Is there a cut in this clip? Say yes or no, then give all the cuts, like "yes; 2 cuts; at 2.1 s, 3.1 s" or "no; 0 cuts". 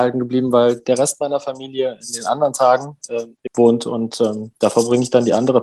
yes; 1 cut; at 3.5 s